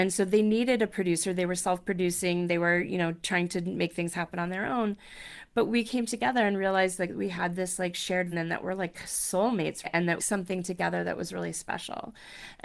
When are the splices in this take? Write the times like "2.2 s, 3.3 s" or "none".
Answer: 8.3 s, 9.8 s, 10.2 s